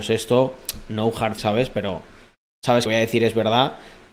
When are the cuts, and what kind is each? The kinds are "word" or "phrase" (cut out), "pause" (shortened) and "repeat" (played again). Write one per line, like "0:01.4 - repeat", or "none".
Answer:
0:01.4 - word
0:02.9 - phrase